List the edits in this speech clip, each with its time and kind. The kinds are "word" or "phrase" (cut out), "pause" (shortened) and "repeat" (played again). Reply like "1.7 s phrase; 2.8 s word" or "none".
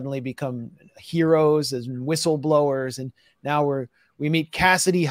none